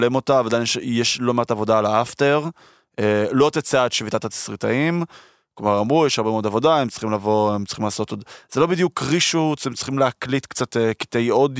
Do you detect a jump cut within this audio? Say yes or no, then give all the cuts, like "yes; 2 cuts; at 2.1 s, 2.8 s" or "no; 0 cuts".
no; 0 cuts